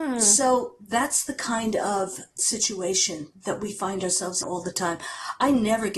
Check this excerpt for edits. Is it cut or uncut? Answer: cut